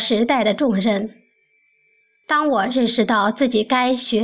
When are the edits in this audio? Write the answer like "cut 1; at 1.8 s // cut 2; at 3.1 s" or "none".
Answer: none

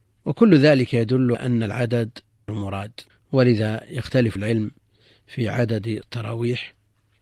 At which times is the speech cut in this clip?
cut 1; at 1.3 s // cut 2; at 2.5 s // cut 3; at 3.1 s // cut 4; at 4.4 s // cut 5; at 6.0 s

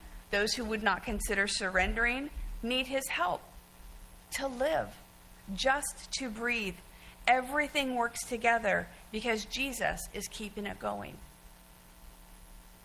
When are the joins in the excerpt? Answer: cut 1; at 4.3 s

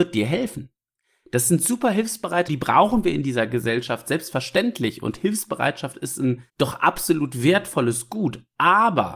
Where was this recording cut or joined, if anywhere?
cut 1; at 2.5 s // cut 2; at 6.5 s

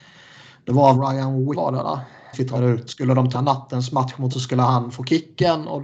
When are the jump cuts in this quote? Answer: cut 1; at 0.9 s // cut 2; at 1.5 s // cut 3; at 2.3 s // cut 4; at 2.9 s // cut 5; at 3.3 s // cut 6; at 4.3 s

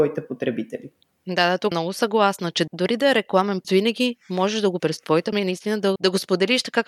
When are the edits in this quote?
cut 1; at 1.7 s // cut 2; at 2.7 s // cut 3; at 3.6 s // cut 4; at 4.8 s // cut 5; at 5.3 s // cut 6; at 6.0 s

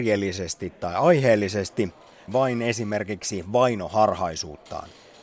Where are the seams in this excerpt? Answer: cut 1; at 2.3 s

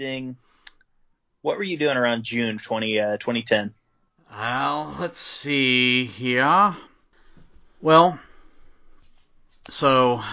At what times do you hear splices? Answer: none

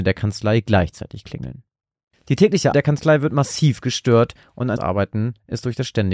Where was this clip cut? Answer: cut 1; at 2.7 s // cut 2; at 4.8 s

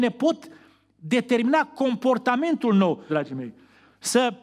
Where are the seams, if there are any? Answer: cut 1; at 3.1 s

